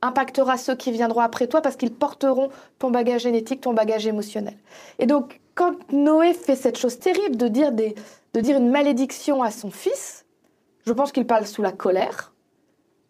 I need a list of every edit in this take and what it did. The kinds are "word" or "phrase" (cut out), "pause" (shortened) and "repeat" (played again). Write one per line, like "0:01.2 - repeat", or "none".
none